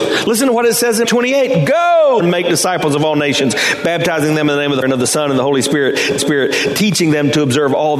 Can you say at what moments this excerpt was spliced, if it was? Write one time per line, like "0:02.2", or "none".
0:01.0
0:02.2
0:04.8
0:06.2